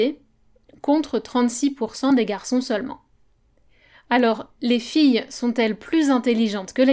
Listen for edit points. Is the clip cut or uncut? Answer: uncut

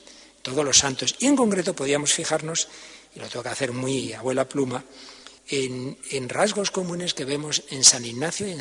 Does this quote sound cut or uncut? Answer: cut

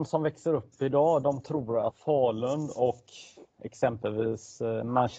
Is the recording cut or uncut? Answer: cut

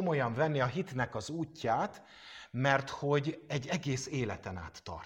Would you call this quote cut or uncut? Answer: uncut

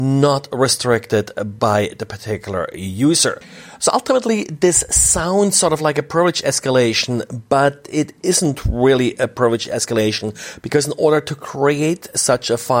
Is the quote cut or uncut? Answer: uncut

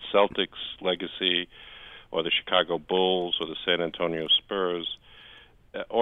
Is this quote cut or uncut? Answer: uncut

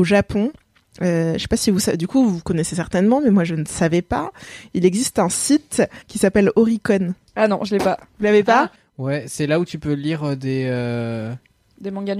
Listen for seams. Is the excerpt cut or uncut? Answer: cut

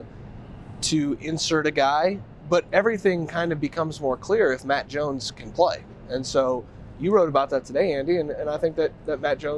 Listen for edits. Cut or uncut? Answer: uncut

